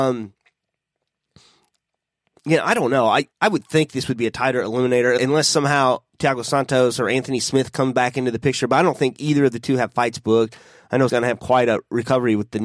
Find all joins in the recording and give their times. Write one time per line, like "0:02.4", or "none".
0:03.3
0:05.2
0:11.1